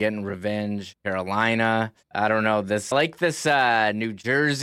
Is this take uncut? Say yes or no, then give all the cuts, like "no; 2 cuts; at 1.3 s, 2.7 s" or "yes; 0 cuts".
no; 3 cuts; at 0.9 s, 2.0 s, 2.9 s